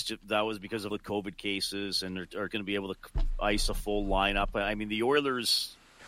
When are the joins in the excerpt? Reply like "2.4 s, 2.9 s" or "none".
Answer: 0.9 s, 2.5 s